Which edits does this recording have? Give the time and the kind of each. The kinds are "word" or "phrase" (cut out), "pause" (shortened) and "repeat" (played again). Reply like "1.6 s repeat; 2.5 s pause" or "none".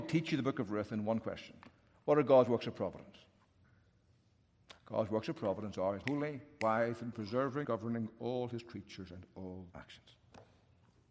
6.0 s word; 7.1 s word; 7.6 s word; 9.7 s word